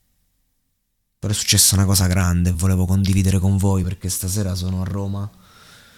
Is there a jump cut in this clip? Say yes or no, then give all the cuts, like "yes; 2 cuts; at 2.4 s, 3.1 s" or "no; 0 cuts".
no; 0 cuts